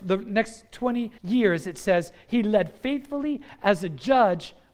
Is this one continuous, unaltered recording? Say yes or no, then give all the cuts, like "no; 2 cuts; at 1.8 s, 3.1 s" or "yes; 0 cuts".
no; 1 cut; at 1.2 s